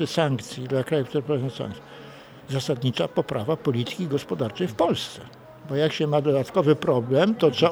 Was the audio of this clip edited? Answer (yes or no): no